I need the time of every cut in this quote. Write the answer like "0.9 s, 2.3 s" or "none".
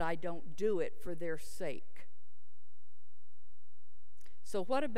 none

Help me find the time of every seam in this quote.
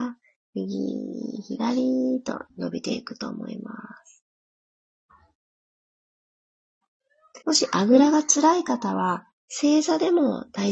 2.5 s, 7.4 s

